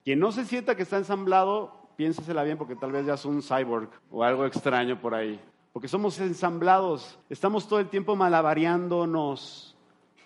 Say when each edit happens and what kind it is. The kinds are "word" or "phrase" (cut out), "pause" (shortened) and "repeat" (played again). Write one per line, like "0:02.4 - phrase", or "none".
0:04.0 - pause
0:05.5 - pause
0:06.2 - word
0:07.2 - pause